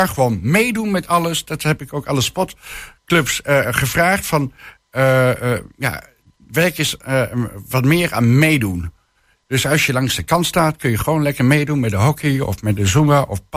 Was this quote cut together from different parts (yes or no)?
no